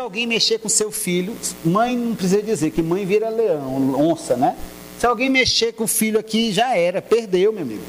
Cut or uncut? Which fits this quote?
uncut